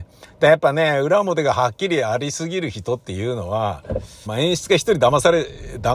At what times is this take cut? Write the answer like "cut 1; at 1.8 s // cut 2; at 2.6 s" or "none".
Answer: cut 1; at 4.3 s